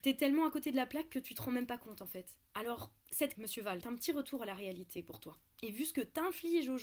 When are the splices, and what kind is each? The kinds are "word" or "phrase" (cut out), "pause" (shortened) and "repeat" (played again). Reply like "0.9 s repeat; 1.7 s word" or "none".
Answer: 3.3 s word; 3.8 s word